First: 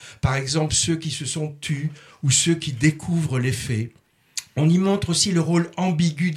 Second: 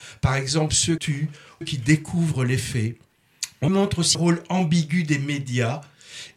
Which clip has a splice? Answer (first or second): second